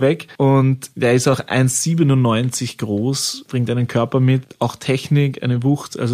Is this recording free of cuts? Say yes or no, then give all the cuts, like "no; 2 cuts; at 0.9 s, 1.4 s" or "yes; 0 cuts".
yes; 0 cuts